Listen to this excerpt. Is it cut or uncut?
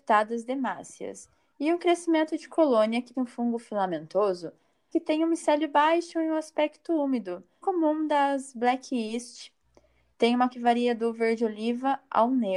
cut